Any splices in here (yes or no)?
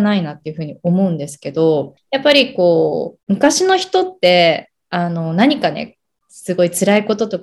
yes